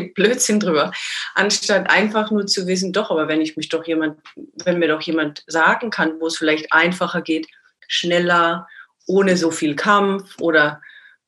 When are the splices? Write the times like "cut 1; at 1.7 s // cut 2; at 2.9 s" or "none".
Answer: none